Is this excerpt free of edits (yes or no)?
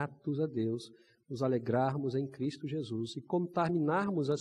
yes